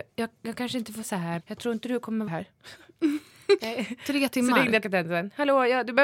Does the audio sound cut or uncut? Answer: cut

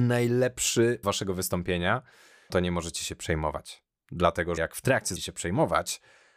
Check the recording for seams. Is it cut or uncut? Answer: cut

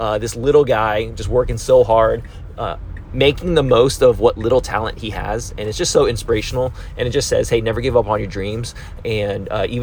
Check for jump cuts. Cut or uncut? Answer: uncut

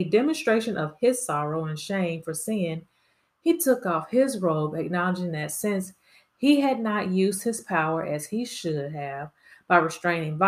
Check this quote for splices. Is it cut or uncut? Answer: uncut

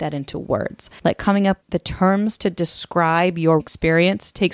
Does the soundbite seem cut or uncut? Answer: cut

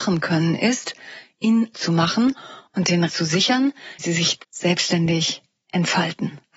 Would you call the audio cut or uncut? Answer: cut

